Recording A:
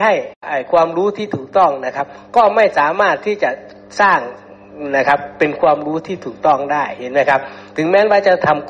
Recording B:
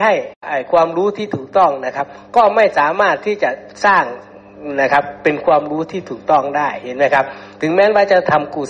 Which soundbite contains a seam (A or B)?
B